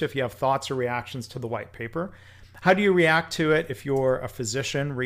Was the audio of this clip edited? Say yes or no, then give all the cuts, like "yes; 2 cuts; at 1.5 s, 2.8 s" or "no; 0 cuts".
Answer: no; 0 cuts